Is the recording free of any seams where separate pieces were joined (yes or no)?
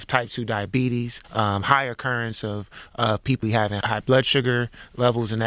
no